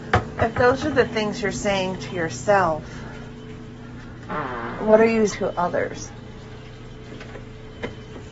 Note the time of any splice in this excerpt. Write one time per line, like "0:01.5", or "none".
0:05.3